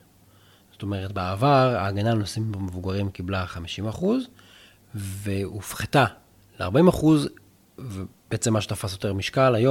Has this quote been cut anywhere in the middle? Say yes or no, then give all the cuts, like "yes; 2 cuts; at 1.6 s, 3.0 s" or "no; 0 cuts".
no; 0 cuts